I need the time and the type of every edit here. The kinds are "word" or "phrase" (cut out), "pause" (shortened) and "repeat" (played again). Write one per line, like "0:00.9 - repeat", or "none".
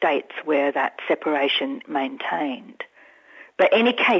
0:01.8 - word